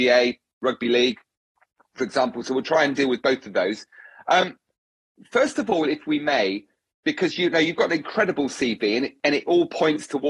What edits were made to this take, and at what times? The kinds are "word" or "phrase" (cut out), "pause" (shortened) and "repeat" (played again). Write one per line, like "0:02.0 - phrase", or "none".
none